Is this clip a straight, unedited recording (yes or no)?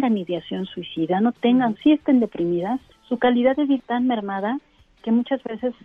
no